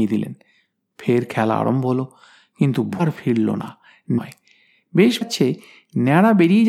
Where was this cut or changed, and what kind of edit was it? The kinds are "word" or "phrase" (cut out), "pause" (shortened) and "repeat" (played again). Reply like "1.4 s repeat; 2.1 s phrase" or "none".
3.0 s word; 4.2 s word; 5.2 s word